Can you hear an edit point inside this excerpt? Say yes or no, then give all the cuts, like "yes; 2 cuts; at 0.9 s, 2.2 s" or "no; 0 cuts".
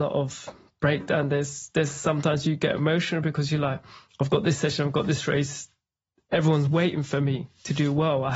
no; 0 cuts